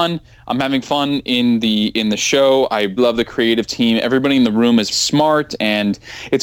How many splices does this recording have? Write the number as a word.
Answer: two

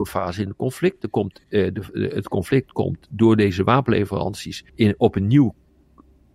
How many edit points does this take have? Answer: one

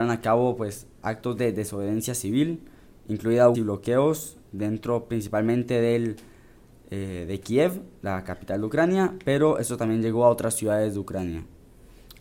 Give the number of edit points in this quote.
one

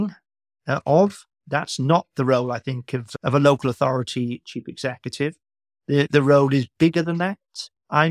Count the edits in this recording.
zero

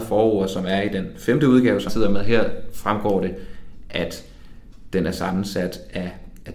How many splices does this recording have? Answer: one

